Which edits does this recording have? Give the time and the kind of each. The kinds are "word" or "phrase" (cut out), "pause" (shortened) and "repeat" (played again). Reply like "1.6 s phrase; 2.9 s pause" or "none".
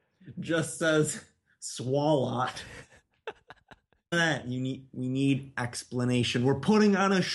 4.1 s word; 5.5 s word